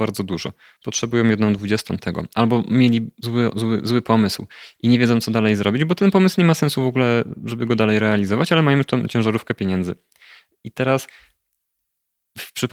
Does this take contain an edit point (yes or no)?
no